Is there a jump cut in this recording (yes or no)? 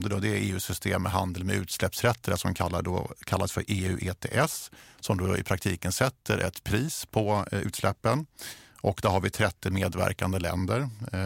no